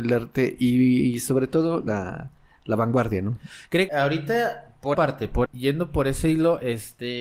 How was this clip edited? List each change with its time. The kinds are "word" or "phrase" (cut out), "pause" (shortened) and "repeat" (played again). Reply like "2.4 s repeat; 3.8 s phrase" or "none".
1.9 s word; 3.9 s word; 4.9 s word; 5.5 s word